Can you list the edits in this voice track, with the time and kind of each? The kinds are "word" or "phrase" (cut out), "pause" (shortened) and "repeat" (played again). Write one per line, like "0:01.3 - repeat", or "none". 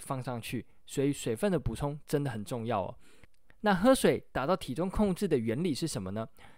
none